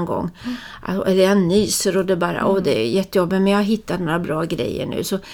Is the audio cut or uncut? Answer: uncut